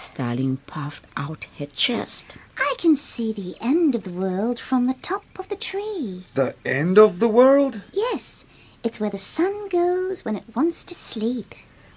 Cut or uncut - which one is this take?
uncut